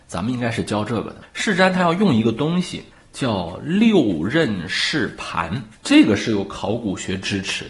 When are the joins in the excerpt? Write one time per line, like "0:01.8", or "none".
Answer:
0:02.9